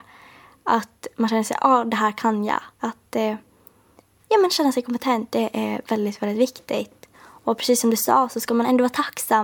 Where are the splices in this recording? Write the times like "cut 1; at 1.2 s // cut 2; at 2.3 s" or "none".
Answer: cut 1; at 2.7 s // cut 2; at 7.1 s